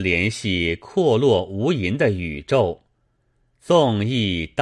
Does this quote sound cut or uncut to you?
uncut